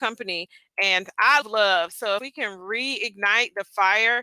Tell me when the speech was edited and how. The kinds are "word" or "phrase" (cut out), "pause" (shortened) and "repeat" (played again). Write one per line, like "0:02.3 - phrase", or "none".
0:01.4 - word
0:02.2 - word

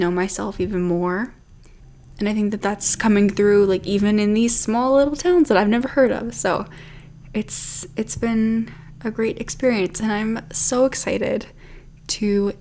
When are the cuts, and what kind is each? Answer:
none

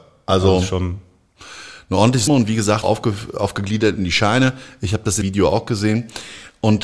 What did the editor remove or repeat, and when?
0:02.3 - word
0:02.8 - word
0:05.2 - word

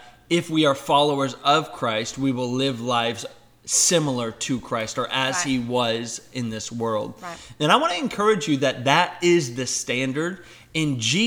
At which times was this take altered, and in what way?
none

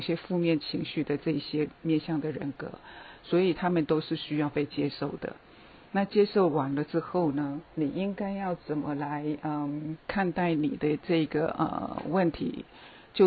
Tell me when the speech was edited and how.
0:07.7 - pause
0:10.0 - word

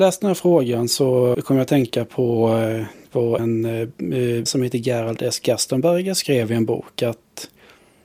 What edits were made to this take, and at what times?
0:01.3 - word
0:03.4 - word
0:04.5 - word

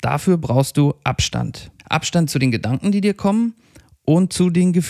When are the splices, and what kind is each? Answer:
0:01.8 - pause

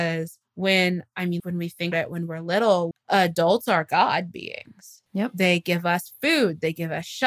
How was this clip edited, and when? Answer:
0:01.4 - word
0:01.9 - word
0:02.9 - word
0:05.1 - pause

